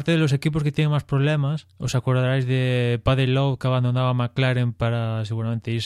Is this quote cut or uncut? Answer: cut